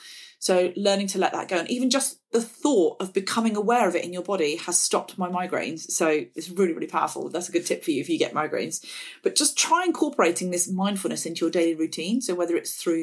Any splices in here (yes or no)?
no